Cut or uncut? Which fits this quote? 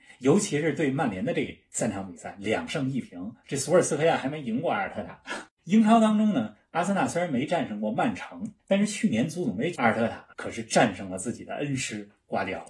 cut